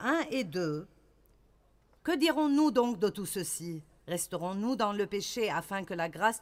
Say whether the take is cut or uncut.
uncut